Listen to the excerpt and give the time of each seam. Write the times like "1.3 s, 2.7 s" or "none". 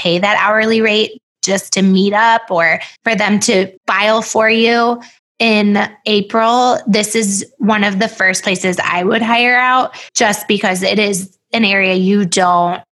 3.0 s, 3.8 s, 5.2 s, 10.1 s